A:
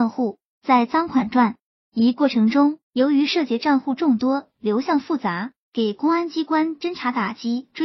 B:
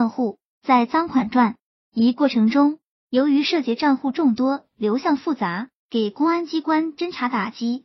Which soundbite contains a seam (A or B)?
A